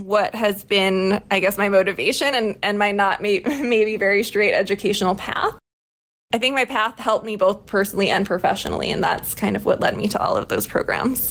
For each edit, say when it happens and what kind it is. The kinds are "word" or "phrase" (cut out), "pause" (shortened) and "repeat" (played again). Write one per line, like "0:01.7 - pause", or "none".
none